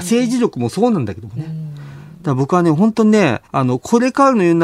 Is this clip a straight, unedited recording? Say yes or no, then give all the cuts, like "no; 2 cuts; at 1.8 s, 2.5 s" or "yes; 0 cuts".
no; 1 cut; at 3.4 s